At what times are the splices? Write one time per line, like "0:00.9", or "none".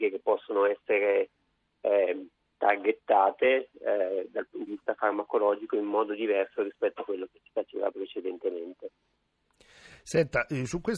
0:04.7